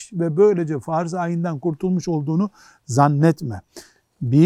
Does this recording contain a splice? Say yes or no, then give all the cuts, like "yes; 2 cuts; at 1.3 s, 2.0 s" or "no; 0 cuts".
no; 0 cuts